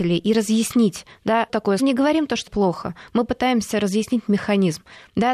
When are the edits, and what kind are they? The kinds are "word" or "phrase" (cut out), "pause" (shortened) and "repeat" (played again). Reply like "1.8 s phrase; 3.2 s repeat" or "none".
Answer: 1.5 s word; 1.8 s phrase; 2.5 s word